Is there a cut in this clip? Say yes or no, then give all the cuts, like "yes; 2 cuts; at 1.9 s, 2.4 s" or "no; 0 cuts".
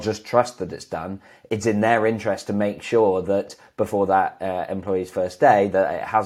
no; 0 cuts